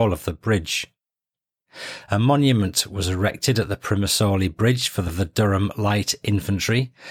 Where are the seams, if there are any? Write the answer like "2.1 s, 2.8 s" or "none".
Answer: 5.1 s